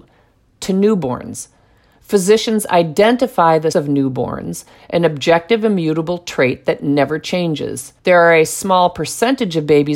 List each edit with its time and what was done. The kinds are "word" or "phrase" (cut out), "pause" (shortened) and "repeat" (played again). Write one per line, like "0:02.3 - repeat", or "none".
0:03.7 - word
0:08.0 - pause